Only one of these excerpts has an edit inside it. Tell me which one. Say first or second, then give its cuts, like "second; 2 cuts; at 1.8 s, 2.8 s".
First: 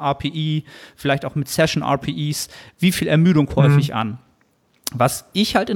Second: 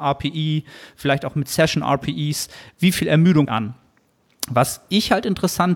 second; 1 cut; at 3.5 s